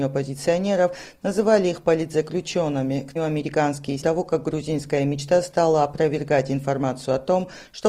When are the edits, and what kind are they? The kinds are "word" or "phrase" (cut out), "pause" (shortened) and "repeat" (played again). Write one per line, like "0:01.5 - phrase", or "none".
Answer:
0:03.2 - phrase
0:04.0 - phrase